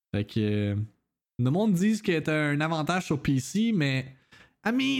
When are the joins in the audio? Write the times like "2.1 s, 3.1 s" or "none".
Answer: none